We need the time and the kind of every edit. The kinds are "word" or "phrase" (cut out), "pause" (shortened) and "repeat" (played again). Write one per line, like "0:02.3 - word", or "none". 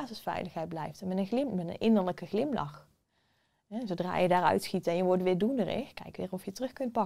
none